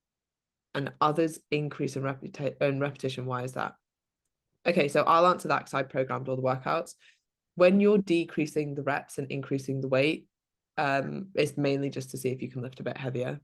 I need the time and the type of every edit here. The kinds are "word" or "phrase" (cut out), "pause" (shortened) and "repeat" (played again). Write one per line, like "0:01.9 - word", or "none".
none